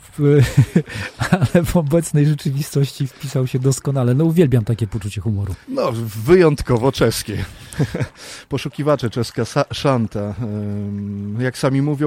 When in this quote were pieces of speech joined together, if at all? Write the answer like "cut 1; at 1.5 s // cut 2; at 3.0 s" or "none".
cut 1; at 5.6 s